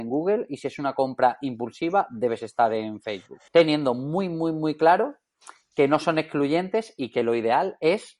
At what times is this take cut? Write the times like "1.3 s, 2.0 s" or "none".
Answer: 3.5 s